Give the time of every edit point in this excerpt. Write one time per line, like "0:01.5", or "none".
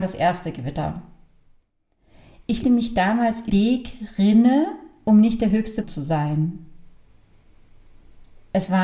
0:02.6
0:03.5
0:05.8